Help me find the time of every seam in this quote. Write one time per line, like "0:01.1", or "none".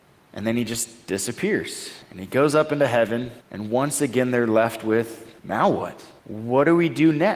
0:02.0
0:03.4
0:05.4
0:06.2